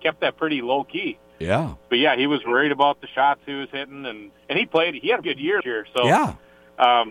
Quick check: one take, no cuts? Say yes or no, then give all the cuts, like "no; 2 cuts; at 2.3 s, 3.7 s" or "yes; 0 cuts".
no; 3 cuts; at 4.3 s, 5.2 s, 5.6 s